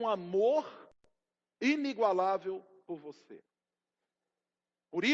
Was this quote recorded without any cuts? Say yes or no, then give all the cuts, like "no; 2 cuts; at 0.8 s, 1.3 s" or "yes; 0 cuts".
yes; 0 cuts